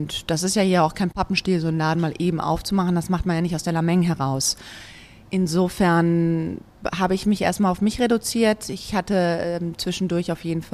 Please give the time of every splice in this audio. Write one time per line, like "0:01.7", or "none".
none